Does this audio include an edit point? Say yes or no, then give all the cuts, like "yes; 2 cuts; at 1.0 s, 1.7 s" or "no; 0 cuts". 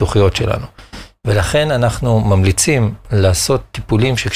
no; 0 cuts